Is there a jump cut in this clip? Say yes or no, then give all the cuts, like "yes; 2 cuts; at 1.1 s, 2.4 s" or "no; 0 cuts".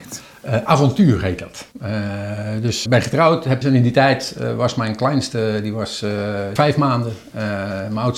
yes; 4 cuts; at 1.7 s, 2.9 s, 3.6 s, 6.6 s